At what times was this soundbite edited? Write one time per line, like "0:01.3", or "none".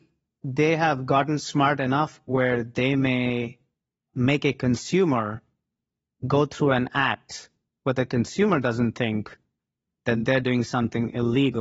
none